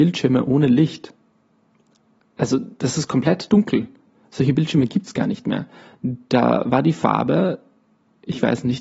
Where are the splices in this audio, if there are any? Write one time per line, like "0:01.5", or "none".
none